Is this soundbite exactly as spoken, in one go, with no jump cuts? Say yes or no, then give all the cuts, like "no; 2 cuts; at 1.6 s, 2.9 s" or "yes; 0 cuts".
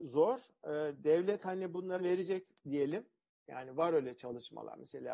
no; 1 cut; at 2.0 s